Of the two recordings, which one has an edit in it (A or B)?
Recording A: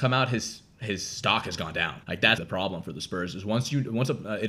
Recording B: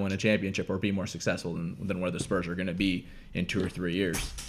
A